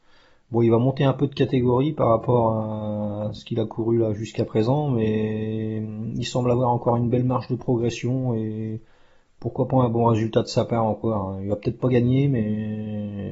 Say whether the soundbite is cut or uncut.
uncut